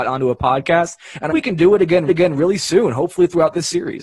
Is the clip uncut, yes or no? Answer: no